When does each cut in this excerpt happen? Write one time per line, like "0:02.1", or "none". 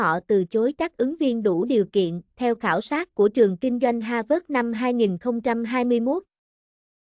0:02.3